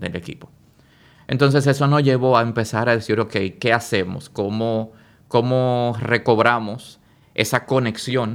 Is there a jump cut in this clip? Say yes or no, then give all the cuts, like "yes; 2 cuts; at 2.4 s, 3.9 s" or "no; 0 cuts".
no; 0 cuts